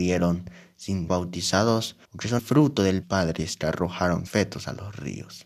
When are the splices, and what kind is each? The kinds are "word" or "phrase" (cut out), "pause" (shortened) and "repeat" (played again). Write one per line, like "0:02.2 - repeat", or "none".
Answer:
0:01.1 - word
0:02.0 - pause
0:02.4 - word
0:03.0 - phrase
0:04.3 - word